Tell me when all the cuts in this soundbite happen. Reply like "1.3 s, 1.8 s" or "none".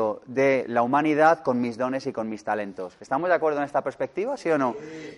none